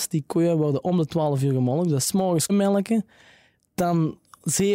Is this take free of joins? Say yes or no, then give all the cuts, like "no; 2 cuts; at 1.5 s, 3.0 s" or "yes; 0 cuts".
no; 1 cut; at 2.5 s